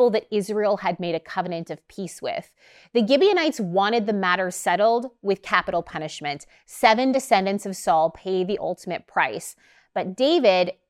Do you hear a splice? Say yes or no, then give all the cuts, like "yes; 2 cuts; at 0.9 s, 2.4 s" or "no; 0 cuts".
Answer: no; 0 cuts